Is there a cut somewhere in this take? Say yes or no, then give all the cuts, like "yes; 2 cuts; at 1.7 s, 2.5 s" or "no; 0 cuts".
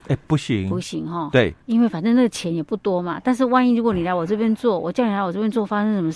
yes; 1 cut; at 1.6 s